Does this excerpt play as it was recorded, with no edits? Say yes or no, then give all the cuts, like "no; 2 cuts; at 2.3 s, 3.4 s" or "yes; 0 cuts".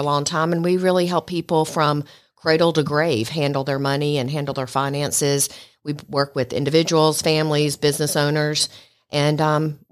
yes; 0 cuts